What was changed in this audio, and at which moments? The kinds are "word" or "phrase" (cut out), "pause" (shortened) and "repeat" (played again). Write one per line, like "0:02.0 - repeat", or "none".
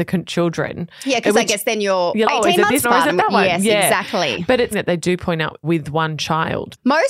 0:02.2 - word
0:02.8 - word
0:04.7 - word
0:05.6 - word